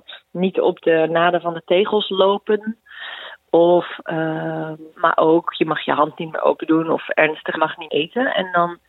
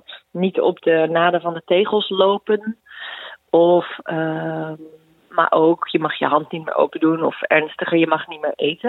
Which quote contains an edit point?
first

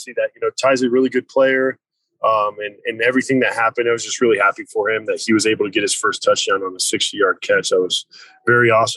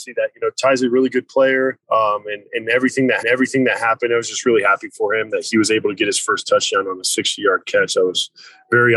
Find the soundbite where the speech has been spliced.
second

